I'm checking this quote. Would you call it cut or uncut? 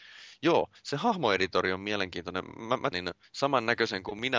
cut